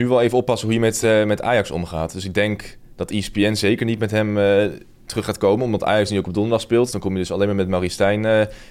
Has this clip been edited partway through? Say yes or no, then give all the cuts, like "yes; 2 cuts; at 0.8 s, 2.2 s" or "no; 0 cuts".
no; 0 cuts